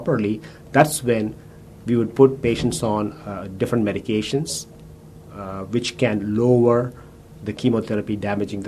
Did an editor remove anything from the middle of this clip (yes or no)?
no